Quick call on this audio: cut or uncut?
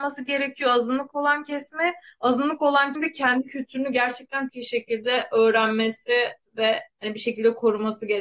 cut